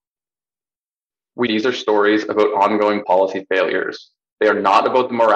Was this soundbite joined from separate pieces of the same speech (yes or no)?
yes